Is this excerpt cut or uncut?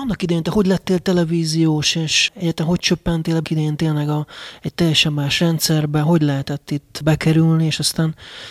cut